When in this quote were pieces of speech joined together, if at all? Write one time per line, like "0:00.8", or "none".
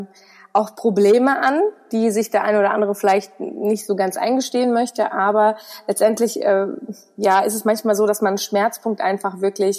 none